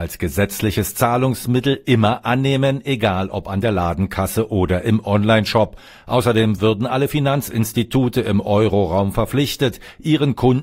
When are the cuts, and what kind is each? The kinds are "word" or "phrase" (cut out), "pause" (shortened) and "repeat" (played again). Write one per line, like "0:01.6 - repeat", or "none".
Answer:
none